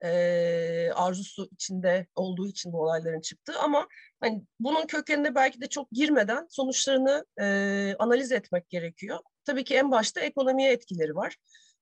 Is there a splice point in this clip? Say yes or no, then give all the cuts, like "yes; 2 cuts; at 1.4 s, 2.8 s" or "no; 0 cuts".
no; 0 cuts